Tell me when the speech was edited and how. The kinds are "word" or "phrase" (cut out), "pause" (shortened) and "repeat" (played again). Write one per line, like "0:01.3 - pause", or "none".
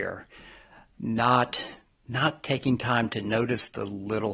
0:01.9 - pause